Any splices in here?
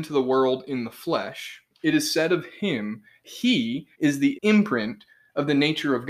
yes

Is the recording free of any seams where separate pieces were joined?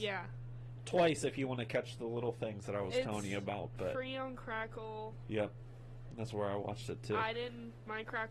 yes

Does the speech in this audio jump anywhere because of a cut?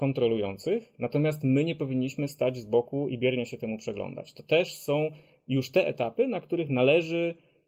no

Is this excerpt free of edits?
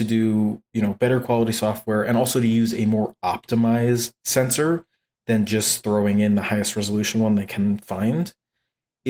yes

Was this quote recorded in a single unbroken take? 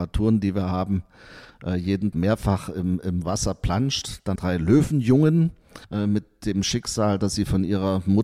no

